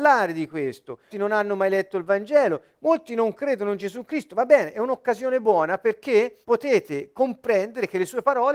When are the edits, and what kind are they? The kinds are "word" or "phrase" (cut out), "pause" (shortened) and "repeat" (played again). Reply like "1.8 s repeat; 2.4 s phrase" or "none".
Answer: 1.1 s word; 6.4 s pause